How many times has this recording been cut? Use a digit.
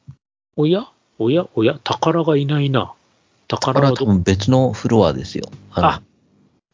0